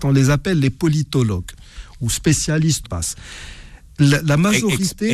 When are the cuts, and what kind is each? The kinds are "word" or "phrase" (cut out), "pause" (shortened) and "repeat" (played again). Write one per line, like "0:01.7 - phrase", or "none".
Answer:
0:02.8 - phrase